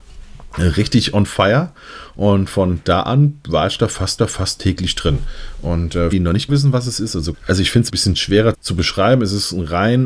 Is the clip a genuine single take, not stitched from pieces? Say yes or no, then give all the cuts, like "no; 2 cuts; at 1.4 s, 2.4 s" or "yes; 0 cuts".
no; 6 cuts; at 4.2 s, 6.1 s, 6.5 s, 7.3 s, 7.9 s, 8.5 s